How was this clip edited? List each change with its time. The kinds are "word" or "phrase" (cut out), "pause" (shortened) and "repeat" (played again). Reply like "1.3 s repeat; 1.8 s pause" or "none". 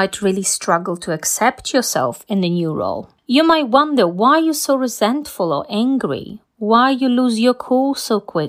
3.2 s pause